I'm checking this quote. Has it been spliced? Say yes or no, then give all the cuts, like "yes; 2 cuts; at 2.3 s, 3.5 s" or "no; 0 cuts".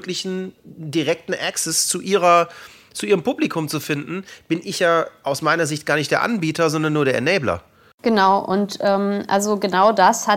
no; 0 cuts